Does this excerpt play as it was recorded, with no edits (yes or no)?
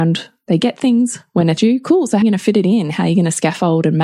no